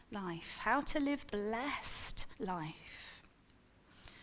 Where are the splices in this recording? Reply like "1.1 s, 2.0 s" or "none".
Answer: 1.3 s, 2.3 s